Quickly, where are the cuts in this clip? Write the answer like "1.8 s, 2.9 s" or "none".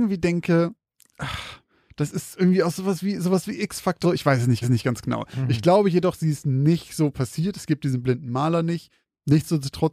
4.0 s, 4.6 s